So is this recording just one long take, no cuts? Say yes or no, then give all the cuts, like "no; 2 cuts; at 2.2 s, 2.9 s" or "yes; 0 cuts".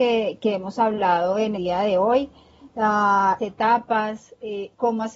no; 2 cuts; at 1.5 s, 3.4 s